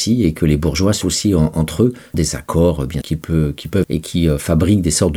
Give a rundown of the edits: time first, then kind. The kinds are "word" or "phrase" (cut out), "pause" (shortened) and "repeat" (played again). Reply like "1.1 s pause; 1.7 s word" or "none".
1.0 s word; 2.1 s word; 3.0 s word; 3.8 s word